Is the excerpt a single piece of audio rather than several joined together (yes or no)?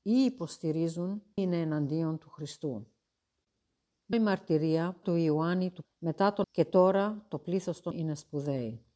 no